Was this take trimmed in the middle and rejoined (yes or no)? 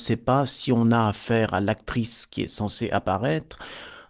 no